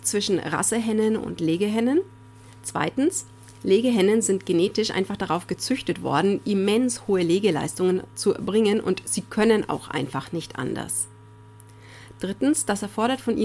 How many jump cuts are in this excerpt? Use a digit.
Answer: 0